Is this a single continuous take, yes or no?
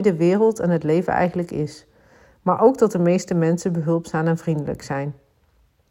yes